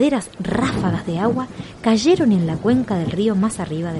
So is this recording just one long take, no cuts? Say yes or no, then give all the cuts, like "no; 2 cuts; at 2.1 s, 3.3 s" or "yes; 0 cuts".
yes; 0 cuts